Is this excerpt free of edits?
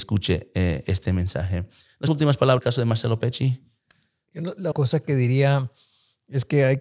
no; 3 cuts; at 2.1 s, 2.6 s, 4.7 s

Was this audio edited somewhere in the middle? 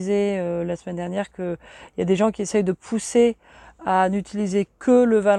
no; 0 cuts

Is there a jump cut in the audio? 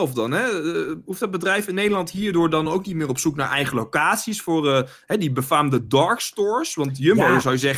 no; 0 cuts

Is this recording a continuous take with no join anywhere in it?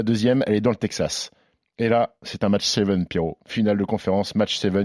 yes; 0 cuts

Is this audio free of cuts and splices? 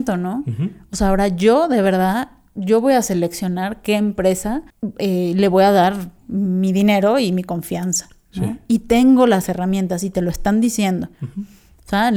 yes; 0 cuts

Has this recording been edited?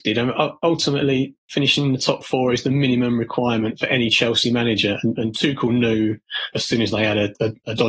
yes; 1 cut; at 6.5 s

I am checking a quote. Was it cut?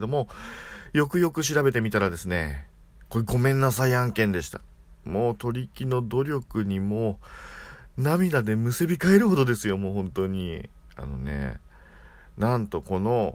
no; 0 cuts

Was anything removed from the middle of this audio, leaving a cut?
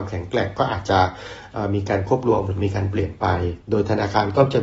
yes; 1 cut; at 3.6 s

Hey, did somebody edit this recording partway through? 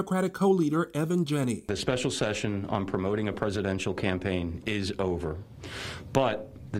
no; 0 cuts

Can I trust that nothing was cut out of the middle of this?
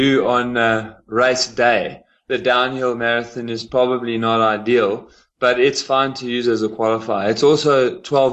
yes; 0 cuts

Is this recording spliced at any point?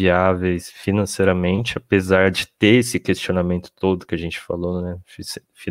no; 0 cuts

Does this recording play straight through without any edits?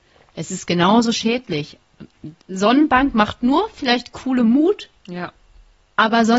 no; 2 cuts; at 2.4 s, 5.0 s

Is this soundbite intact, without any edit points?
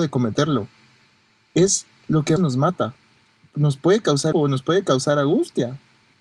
no; 2 cuts; at 2.4 s, 4.3 s

